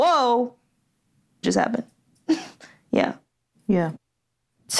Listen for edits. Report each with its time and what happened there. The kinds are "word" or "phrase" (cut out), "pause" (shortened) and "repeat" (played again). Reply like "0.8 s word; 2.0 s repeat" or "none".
1.4 s word